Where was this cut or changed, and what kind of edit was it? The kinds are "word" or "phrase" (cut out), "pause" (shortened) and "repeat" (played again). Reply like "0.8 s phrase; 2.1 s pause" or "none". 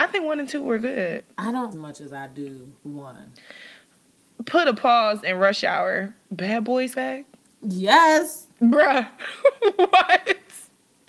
1.3 s pause; 1.7 s phrase; 2.8 s pause; 6.9 s word